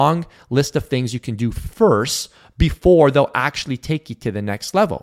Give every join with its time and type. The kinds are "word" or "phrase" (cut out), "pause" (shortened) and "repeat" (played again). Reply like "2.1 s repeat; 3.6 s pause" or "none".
none